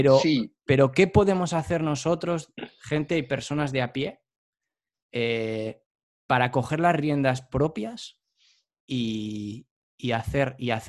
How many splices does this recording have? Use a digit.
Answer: 0